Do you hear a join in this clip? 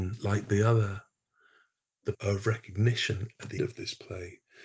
yes; 2 cuts; at 2.1 s, 3.6 s

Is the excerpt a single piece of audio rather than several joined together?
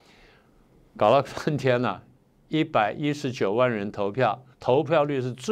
no; 1 cut; at 4.5 s

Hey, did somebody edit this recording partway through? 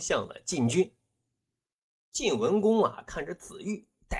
no; 0 cuts

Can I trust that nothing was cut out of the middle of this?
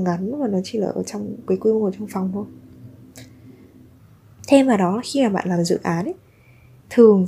yes; 0 cuts

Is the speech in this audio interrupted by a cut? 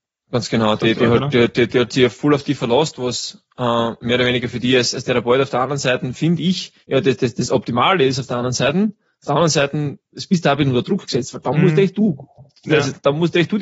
yes; 1 cut; at 6.8 s

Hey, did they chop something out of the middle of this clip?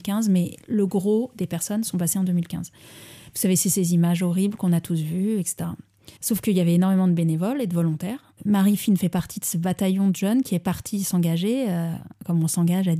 yes; 1 cut; at 6.2 s

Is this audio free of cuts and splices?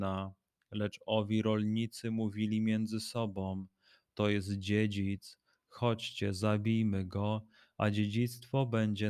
yes; 0 cuts

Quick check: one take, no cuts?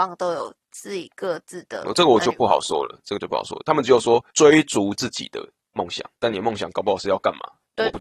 no; 2 cuts; at 4.3 s, 6.1 s

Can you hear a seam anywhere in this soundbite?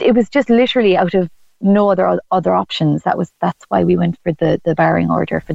no; 0 cuts

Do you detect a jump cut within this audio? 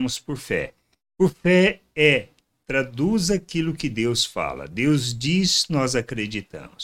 no; 0 cuts

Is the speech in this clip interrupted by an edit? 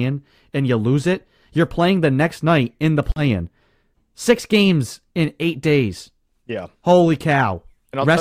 no; 0 cuts

